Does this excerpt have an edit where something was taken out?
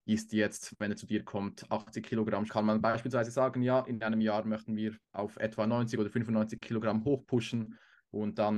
yes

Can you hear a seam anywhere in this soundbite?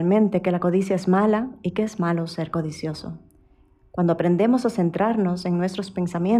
no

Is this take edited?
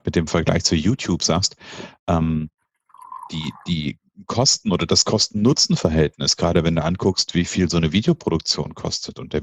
no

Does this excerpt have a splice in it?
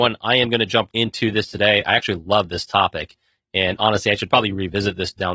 yes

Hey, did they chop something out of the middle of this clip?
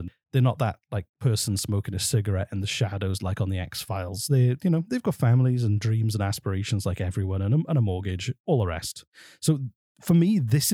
no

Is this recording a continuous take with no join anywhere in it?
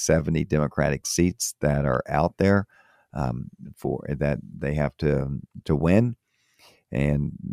yes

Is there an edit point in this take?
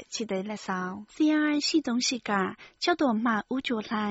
yes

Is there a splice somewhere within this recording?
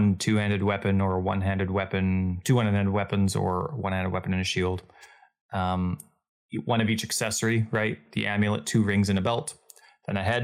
no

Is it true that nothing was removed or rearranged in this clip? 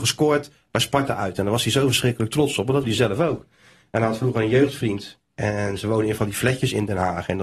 no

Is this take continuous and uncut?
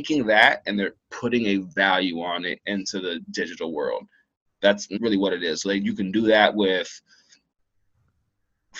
no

